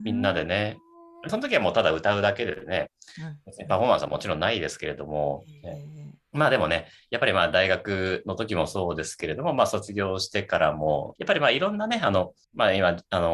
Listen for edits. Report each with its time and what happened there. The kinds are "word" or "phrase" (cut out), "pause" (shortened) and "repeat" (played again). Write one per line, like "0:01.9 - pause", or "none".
0:01.3 - phrase
0:06.2 - pause
0:11.2 - word
0:12.4 - pause